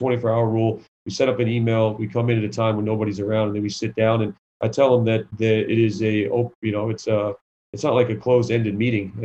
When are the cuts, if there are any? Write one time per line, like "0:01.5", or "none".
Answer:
none